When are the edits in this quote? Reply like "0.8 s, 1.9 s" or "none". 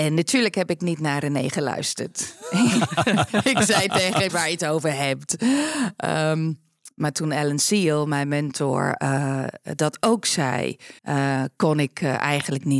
4.3 s, 11.0 s